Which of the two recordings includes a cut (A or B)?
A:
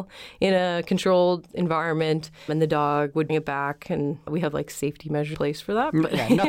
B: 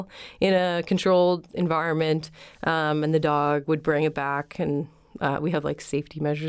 A